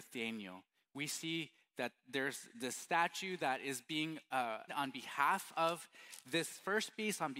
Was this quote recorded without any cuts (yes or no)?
no